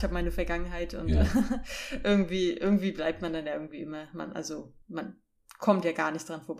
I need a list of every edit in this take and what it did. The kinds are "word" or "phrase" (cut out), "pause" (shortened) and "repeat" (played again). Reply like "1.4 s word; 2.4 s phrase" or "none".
4.8 s pause